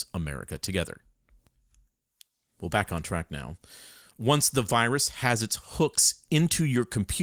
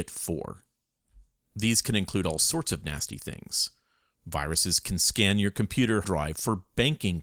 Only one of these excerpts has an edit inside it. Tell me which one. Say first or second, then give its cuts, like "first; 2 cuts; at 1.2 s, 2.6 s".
second; 1 cut; at 6.0 s